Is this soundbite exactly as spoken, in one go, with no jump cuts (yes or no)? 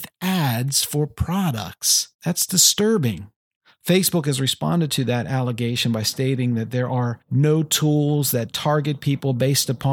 no